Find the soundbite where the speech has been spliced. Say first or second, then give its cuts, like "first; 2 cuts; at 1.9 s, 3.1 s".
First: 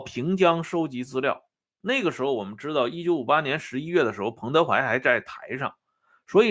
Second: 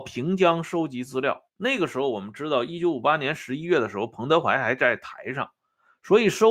second; 1 cut; at 1.5 s